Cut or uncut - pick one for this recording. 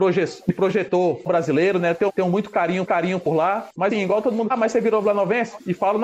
cut